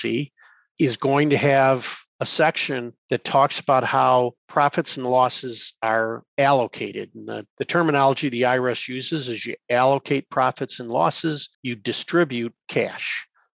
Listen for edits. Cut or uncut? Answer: cut